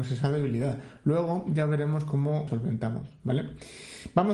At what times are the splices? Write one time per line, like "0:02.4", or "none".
0:02.5